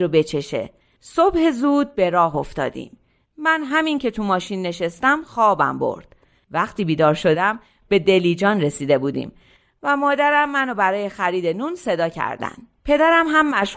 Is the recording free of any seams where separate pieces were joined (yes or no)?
yes